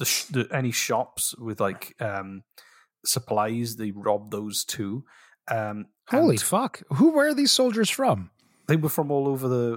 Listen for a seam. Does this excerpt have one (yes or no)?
no